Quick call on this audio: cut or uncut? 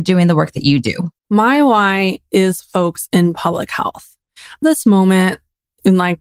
cut